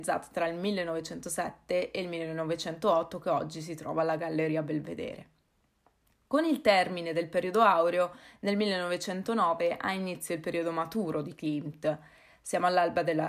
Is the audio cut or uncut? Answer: uncut